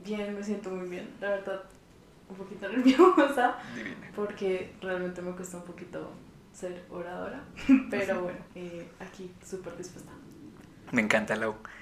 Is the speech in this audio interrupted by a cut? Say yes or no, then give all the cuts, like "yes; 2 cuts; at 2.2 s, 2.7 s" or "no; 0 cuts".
yes; 1 cut; at 8.5 s